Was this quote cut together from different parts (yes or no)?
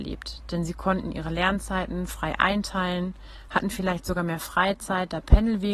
no